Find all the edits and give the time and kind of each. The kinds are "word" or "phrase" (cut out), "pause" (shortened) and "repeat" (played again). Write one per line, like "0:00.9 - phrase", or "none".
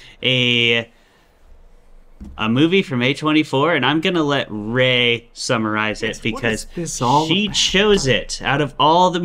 none